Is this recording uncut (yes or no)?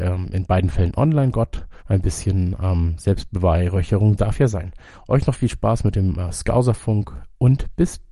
no